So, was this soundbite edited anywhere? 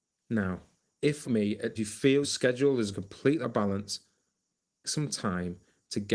yes; 6 cuts; at 1.2 s, 1.8 s, 2.2 s, 2.9 s, 3.4 s, 4.8 s

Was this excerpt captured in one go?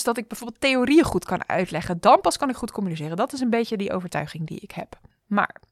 yes; 0 cuts

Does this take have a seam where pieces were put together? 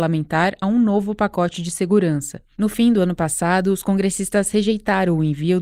no; 0 cuts

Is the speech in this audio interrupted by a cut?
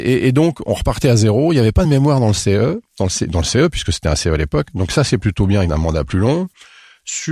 no; 0 cuts

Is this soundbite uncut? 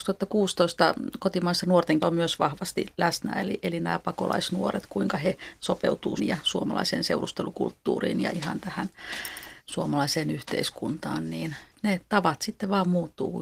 no; 4 cuts; at 2.0 s, 6.2 s, 8.3 s, 9.6 s

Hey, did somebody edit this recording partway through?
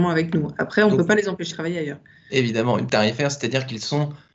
yes; 2 cuts; at 1.5 s, 2.9 s

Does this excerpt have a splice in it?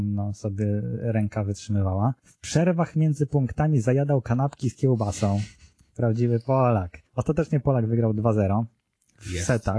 yes; 2 cuts; at 2.2 s, 7.1 s

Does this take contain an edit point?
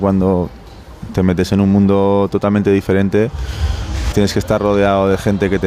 yes; 1 cut; at 4.1 s

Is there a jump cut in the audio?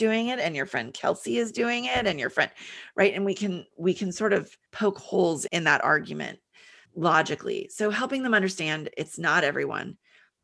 yes; 3 cuts; at 4.7 s, 5.5 s, 6.9 s

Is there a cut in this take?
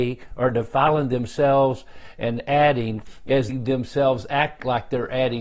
yes; 1 cut; at 3.5 s

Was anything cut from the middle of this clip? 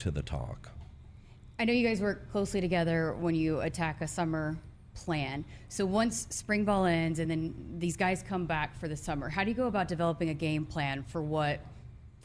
no; 0 cuts

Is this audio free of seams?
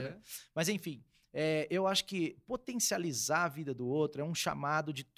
yes; 0 cuts

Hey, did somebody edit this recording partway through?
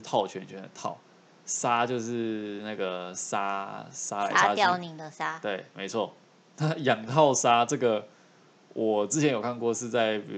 no; 0 cuts

